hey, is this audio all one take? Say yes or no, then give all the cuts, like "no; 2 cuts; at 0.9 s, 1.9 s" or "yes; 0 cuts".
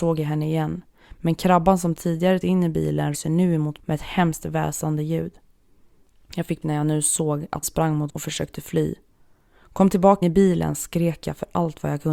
no; 7 cuts; at 2.4 s, 3.1 s, 3.8 s, 6.6 s, 7.6 s, 8.1 s, 10.2 s